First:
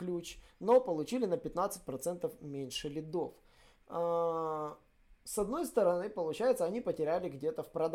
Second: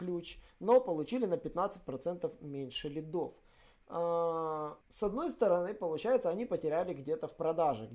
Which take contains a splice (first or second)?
second